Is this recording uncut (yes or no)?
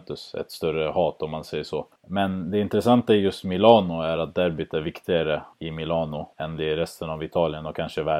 no